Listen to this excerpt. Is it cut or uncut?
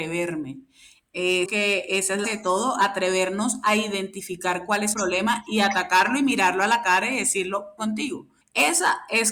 cut